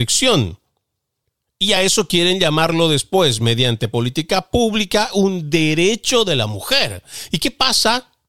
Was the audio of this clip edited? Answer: no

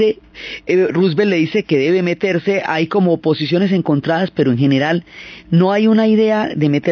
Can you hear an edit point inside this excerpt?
no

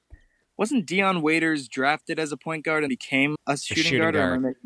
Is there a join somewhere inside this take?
yes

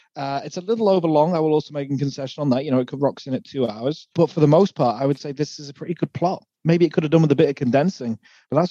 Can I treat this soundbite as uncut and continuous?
no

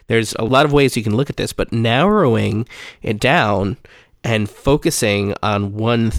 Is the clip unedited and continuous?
yes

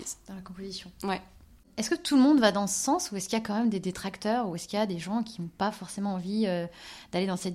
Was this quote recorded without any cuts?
yes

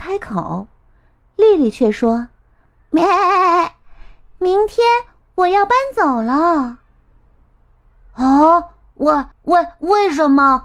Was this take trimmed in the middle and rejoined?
yes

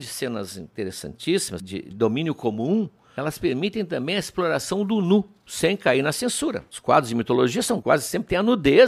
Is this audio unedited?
yes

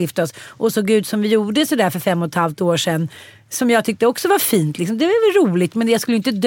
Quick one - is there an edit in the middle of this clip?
no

